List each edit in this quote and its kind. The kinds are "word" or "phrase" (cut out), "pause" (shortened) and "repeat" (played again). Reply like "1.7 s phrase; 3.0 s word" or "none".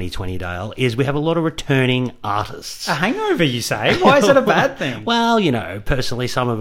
none